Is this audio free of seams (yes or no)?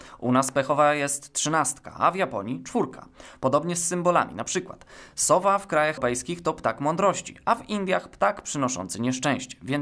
no